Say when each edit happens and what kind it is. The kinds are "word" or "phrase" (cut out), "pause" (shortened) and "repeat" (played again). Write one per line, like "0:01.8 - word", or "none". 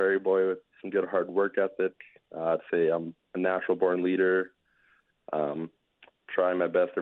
none